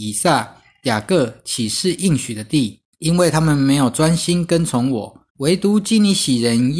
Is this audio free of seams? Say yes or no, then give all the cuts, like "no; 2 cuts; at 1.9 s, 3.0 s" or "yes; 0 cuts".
no; 2 cuts; at 2.9 s, 5.3 s